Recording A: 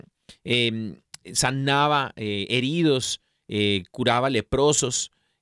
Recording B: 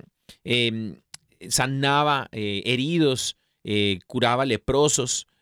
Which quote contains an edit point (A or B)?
A